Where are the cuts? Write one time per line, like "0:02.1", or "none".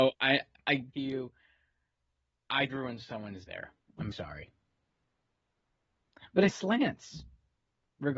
0:00.9
0:02.7
0:03.5
0:04.1
0:06.5